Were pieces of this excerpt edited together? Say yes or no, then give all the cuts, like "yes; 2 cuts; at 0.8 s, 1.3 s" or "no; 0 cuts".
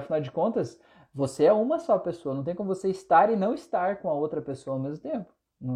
no; 0 cuts